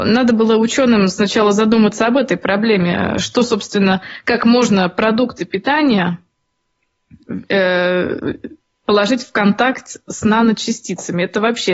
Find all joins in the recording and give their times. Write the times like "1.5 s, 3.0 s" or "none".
none

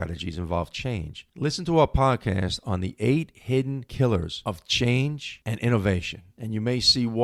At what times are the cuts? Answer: none

